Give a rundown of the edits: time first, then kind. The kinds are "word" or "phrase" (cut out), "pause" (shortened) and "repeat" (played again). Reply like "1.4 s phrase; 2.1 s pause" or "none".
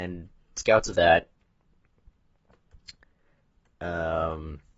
1.0 s word